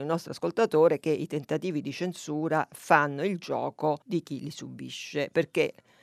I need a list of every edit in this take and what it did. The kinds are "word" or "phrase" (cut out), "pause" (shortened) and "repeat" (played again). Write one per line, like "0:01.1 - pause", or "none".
0:04.0 - pause